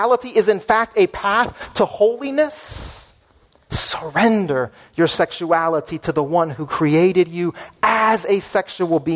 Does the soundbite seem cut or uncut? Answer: uncut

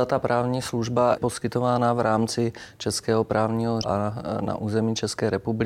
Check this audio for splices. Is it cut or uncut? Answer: cut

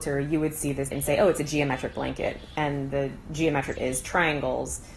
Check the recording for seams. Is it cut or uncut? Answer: cut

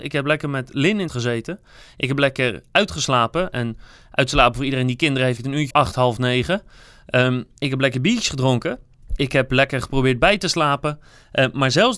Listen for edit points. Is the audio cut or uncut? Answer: cut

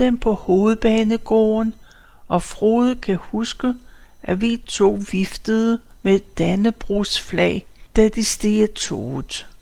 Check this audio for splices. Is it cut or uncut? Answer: uncut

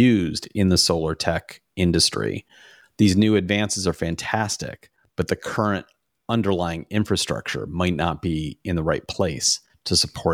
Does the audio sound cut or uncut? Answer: uncut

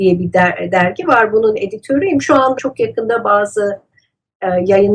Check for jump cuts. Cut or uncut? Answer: cut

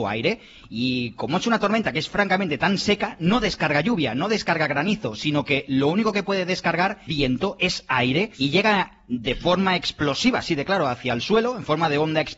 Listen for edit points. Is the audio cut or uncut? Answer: cut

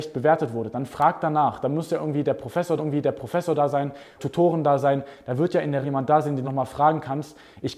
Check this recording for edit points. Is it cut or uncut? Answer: cut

